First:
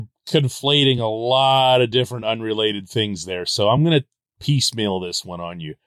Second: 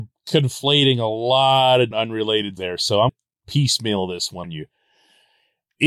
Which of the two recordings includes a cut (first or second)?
second